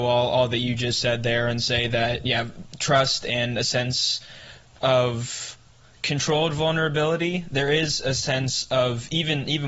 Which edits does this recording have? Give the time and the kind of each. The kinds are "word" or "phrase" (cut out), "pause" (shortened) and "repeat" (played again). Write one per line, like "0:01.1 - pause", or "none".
none